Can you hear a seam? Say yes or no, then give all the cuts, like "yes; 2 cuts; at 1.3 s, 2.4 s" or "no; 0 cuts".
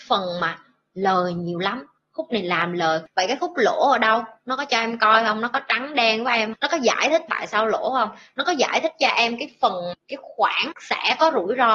yes; 4 cuts; at 6.5 s, 7.3 s, 9.9 s, 10.7 s